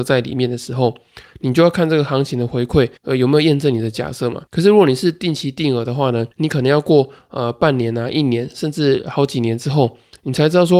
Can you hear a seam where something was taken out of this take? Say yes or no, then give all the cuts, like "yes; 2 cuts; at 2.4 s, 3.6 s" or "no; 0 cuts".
yes; 3 cuts; at 3.0 s, 4.5 s, 6.3 s